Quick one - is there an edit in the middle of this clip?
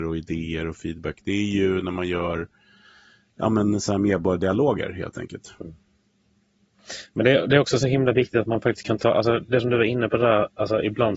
no; 0 cuts

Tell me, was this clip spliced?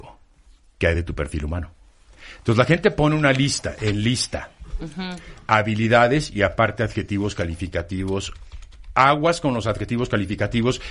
no; 0 cuts

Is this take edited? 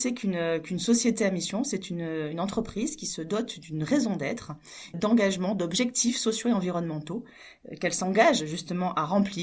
yes; 1 cut; at 4.9 s

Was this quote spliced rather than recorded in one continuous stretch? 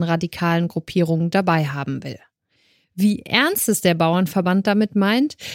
no; 0 cuts

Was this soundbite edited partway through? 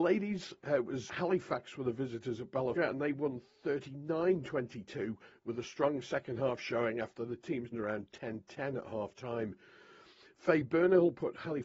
yes; 3 cuts; at 1.1 s, 2.8 s, 7.7 s

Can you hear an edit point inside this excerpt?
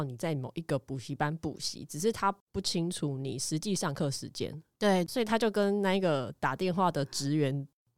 yes; 2 cuts; at 2.4 s, 5.1 s

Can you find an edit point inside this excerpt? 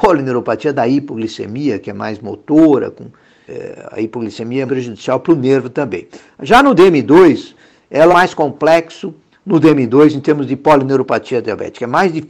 yes; 3 cuts; at 3.5 s, 4.7 s, 8.1 s

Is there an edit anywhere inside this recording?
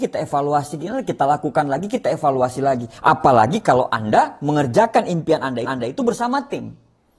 yes; 2 cuts; at 3.0 s, 5.6 s

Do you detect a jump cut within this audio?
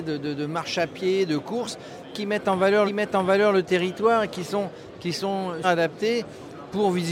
yes; 2 cuts; at 2.9 s, 5.6 s

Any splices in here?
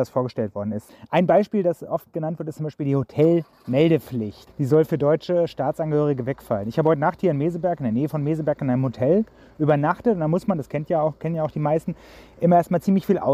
no; 0 cuts

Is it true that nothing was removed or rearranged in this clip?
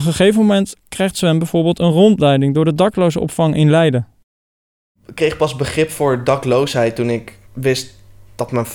no; 1 cut; at 7.5 s

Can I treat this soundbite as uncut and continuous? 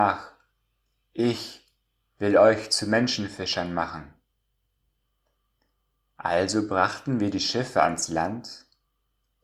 yes; 0 cuts

